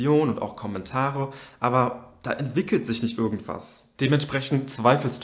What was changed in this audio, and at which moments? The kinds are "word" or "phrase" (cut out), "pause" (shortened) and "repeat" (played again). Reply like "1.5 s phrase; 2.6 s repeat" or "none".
3.2 s word; 3.9 s pause